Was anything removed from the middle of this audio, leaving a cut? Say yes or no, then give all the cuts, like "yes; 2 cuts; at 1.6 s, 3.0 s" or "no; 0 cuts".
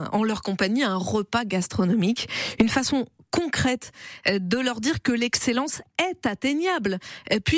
no; 0 cuts